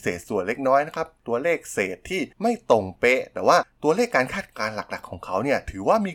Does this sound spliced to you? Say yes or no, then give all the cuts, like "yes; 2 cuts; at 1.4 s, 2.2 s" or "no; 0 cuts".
yes; 1 cut; at 2.3 s